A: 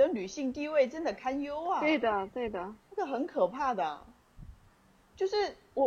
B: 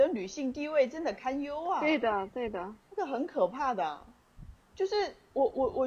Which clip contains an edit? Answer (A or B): B